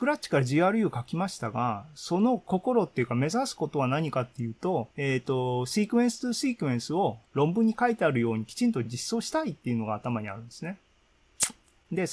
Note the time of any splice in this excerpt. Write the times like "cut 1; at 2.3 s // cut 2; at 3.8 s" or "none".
cut 1; at 4.9 s // cut 2; at 7.3 s